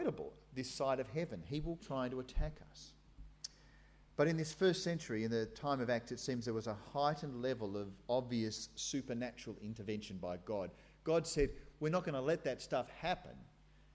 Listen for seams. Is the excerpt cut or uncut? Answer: cut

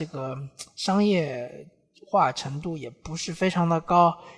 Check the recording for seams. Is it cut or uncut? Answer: uncut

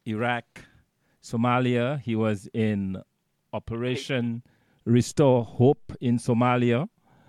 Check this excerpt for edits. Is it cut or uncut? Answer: uncut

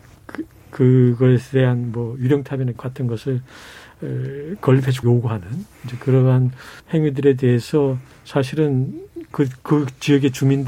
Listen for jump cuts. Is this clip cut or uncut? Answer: cut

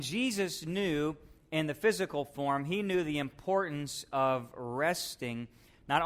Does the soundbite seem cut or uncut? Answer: uncut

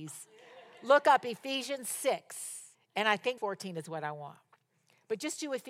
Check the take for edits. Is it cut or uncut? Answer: cut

